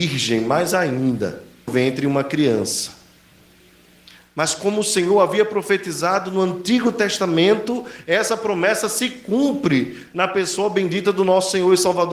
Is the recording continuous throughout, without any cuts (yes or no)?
no